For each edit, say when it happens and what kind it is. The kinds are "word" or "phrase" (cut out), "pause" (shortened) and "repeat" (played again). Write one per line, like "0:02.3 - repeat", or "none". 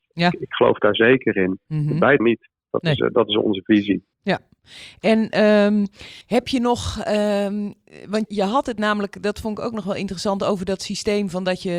0:02.2 - word
0:04.1 - pause
0:06.2 - pause
0:08.3 - word

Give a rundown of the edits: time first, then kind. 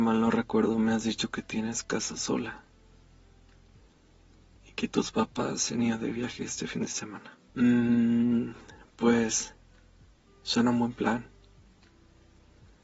0:07.5 - pause

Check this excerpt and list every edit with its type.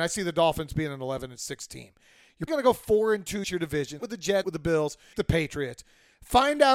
0:02.5 - word
0:03.4 - word
0:04.0 - word
0:04.4 - word
0:05.1 - word

